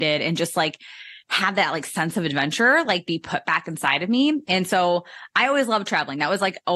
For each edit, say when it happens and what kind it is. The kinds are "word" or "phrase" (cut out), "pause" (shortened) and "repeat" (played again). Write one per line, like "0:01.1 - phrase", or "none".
none